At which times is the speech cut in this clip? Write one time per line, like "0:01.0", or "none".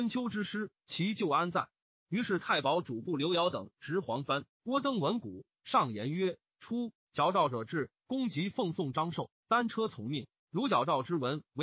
0:10.4

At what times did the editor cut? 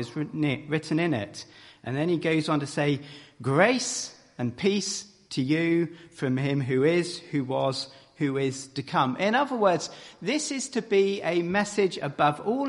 none

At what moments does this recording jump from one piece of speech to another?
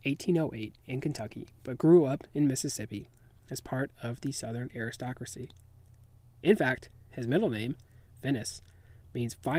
none

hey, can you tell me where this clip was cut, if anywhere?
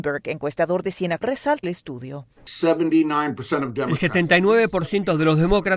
0:01.2
0:01.6
0:02.4

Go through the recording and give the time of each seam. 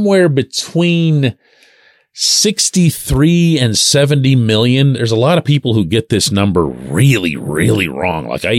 none

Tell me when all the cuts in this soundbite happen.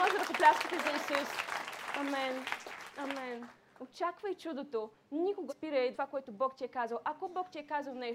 0:05.5
0:05.9

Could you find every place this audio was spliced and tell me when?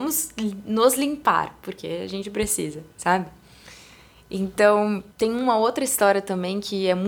0:05.1

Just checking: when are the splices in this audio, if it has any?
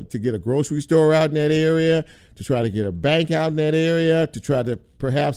none

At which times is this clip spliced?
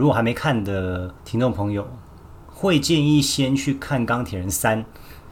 0:01.2

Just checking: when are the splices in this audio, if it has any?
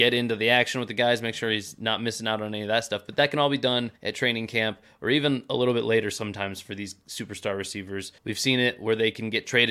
0:04.0
0:08.2

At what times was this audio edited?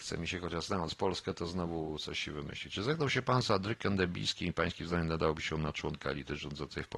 none

